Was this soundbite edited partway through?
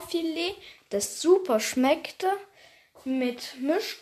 no; 0 cuts

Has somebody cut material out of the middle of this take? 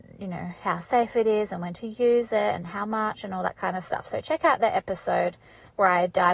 no; 0 cuts

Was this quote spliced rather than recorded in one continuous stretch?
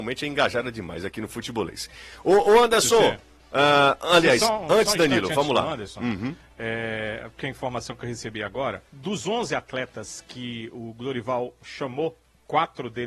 yes; 1 cut; at 8.9 s

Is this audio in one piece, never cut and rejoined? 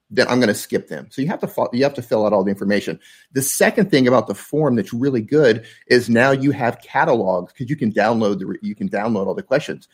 yes; 0 cuts

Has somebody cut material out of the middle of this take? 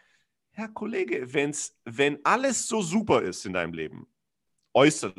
no; 0 cuts

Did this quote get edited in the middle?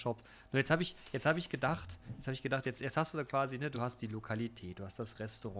no; 0 cuts

